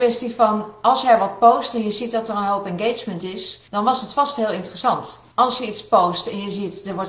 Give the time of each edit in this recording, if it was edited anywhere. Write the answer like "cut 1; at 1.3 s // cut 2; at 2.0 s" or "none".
cut 1; at 3.7 s // cut 2; at 5.3 s